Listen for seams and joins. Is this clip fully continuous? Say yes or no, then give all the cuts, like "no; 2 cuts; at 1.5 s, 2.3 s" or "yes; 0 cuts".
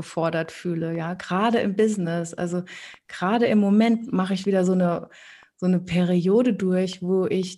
yes; 0 cuts